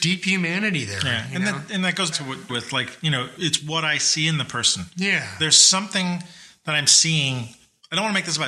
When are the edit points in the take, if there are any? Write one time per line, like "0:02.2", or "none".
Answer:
0:02.1
0:02.5
0:03.4